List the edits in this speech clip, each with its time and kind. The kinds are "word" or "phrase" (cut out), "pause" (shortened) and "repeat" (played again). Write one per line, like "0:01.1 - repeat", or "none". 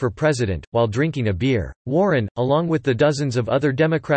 0:01.8 - pause